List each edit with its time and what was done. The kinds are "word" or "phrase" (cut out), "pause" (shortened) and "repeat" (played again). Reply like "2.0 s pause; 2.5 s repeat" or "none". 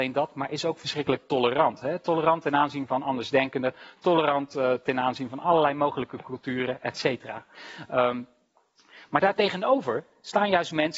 none